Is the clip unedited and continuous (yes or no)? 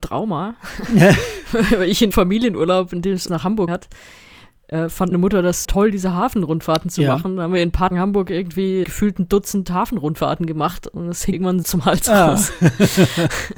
no